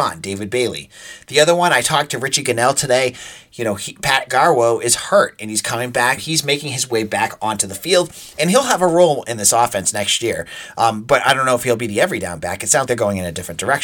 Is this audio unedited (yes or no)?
no